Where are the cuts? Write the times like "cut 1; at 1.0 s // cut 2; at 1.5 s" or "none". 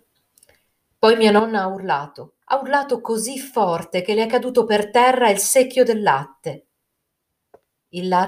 cut 1; at 2.4 s